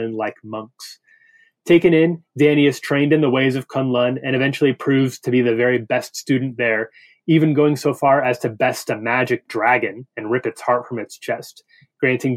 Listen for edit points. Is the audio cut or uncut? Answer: uncut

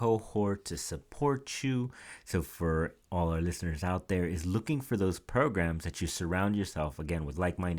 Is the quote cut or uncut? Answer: uncut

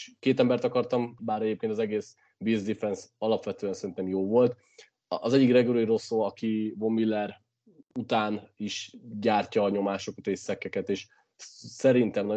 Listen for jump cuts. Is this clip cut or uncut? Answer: cut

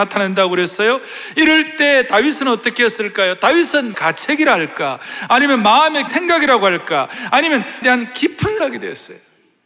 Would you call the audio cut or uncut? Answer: cut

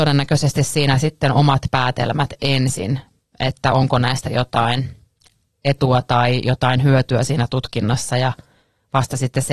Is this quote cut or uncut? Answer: uncut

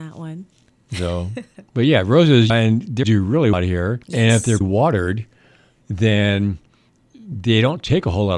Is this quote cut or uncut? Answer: cut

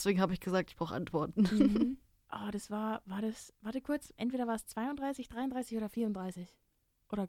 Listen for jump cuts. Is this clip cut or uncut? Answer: uncut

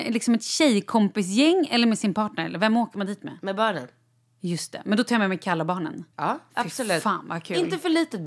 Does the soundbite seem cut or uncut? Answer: cut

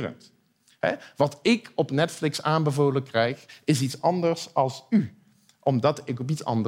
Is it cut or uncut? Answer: uncut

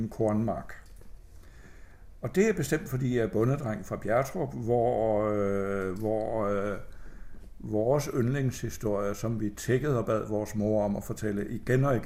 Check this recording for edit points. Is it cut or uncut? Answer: uncut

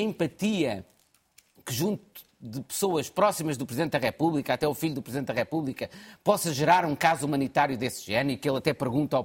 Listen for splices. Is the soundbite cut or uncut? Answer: uncut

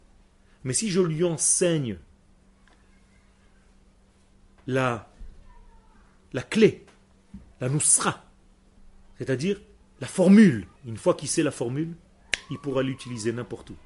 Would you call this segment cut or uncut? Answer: cut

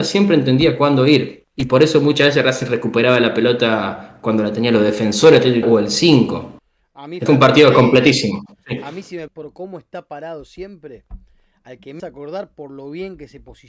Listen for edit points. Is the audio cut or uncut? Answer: cut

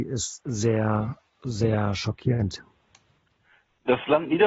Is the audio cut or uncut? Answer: uncut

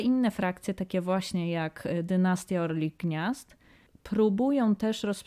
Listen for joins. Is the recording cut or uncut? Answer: uncut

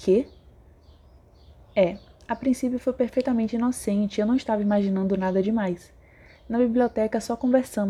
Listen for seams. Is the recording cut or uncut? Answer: uncut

